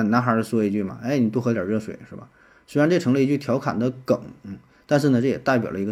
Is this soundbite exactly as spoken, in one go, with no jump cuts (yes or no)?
yes